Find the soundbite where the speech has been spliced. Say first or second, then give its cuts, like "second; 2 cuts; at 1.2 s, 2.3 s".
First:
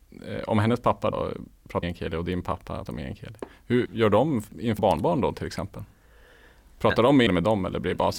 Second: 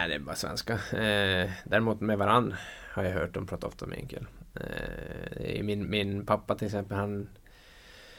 first; 6 cuts; at 1.1 s, 1.8 s, 2.9 s, 3.9 s, 4.8 s, 7.3 s